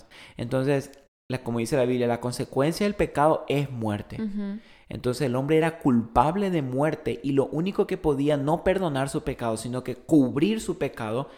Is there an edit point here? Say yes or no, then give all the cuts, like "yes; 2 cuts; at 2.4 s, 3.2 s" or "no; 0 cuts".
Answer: no; 0 cuts